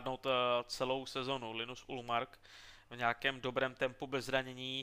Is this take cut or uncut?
uncut